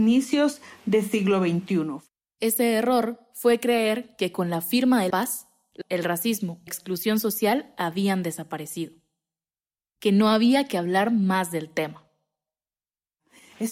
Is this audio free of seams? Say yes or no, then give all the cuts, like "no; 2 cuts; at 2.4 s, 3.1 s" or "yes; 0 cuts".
no; 3 cuts; at 5.1 s, 5.8 s, 6.7 s